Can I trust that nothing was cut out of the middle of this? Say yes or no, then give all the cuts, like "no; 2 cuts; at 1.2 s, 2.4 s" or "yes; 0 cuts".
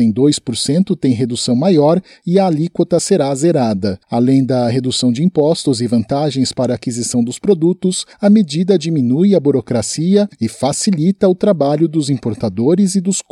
no; 3 cuts; at 4.0 s, 8.1 s, 10.3 s